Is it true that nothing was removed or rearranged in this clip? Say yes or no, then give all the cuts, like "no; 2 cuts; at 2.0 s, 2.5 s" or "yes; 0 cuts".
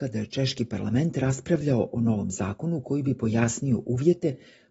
yes; 0 cuts